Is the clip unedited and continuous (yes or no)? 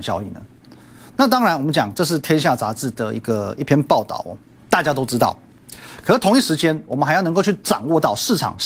yes